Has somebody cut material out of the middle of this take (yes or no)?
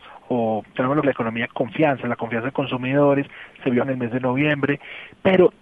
yes